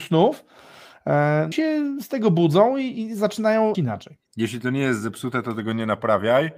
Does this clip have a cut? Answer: yes; 3 cuts; at 1.5 s, 3.7 s, 4.3 s

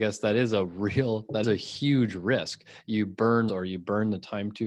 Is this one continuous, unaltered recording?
no; 2 cuts; at 1.4 s, 3.5 s

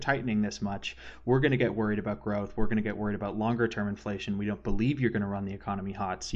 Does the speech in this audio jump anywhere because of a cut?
no; 0 cuts

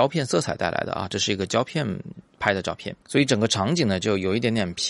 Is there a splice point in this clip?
yes; 1 cut; at 3.0 s

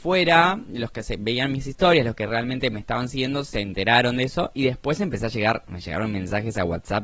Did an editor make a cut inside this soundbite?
no; 0 cuts

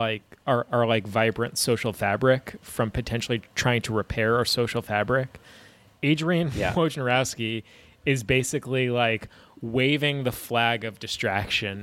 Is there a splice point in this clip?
no; 0 cuts

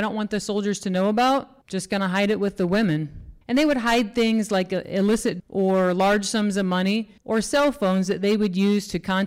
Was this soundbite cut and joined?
yes; 4 cuts; at 1.6 s, 3.4 s, 5.4 s, 7.2 s

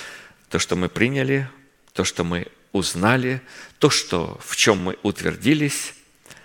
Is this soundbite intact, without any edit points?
yes; 0 cuts

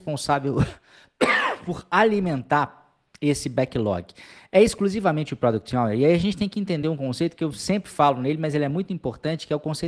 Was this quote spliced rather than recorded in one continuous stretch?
no; 0 cuts

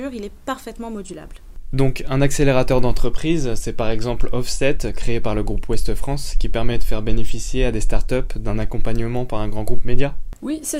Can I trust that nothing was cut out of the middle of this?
yes; 0 cuts

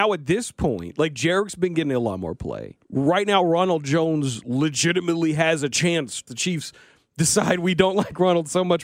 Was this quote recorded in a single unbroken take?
no; 2 cuts; at 2.8 s, 6.3 s

